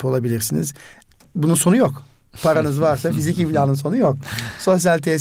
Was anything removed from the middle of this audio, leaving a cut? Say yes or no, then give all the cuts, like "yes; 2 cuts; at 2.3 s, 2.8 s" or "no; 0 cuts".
no; 0 cuts